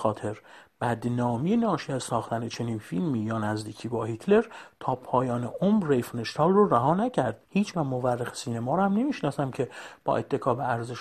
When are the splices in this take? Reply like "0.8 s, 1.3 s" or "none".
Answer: 7.7 s